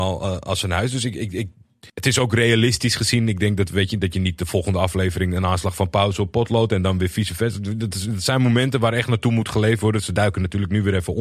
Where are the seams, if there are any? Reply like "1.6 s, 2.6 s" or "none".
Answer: 1.9 s